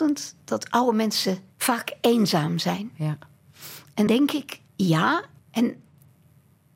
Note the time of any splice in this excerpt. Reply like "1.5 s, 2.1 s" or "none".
1.5 s, 4.1 s, 4.7 s